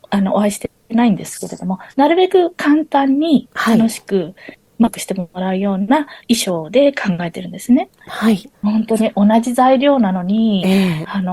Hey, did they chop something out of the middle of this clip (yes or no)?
yes